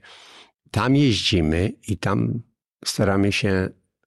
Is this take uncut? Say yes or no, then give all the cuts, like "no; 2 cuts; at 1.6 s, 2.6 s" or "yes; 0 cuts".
yes; 0 cuts